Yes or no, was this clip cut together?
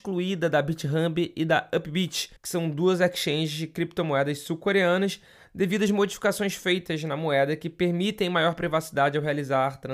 yes